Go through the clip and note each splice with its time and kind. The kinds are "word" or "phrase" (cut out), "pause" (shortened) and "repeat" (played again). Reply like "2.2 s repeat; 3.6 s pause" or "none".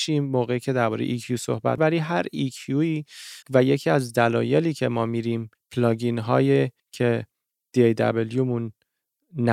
1.8 s word; 3.4 s pause; 5.5 s pause; 6.8 s pause